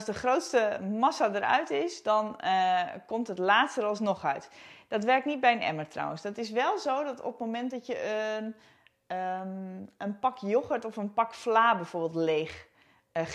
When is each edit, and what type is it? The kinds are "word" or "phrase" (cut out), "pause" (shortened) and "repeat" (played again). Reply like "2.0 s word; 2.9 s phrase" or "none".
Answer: none